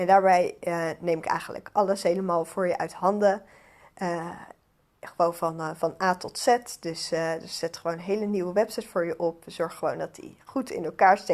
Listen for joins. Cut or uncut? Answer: uncut